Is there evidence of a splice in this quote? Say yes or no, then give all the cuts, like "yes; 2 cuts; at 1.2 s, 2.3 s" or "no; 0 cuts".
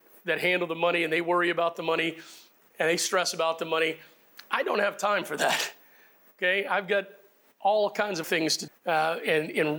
yes; 2 cuts; at 8.2 s, 8.7 s